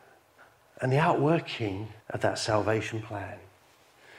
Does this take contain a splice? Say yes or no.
yes